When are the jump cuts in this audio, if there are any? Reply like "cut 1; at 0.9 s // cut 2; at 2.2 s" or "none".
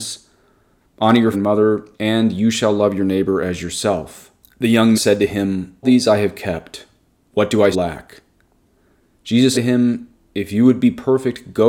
cut 1; at 1.3 s // cut 2; at 1.9 s // cut 3; at 4.9 s // cut 4; at 5.8 s // cut 5; at 7.7 s // cut 6; at 9.5 s